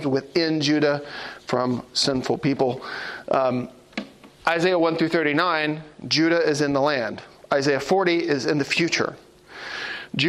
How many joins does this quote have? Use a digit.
2